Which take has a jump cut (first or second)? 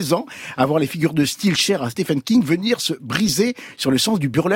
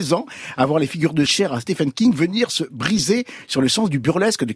second